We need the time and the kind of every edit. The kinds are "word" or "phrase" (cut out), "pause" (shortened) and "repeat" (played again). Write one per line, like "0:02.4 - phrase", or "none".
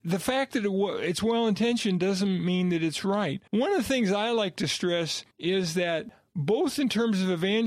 0:03.5 - pause
0:05.3 - pause